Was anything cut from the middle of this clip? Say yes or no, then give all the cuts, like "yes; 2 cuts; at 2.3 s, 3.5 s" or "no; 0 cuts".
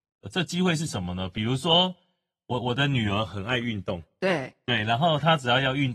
no; 0 cuts